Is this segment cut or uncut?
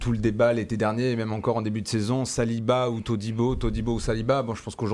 uncut